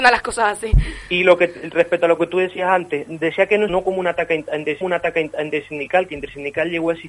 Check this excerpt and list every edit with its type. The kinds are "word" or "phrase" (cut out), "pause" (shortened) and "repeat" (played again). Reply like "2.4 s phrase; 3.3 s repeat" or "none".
3.0 s word; 3.7 s phrase; 4.8 s repeat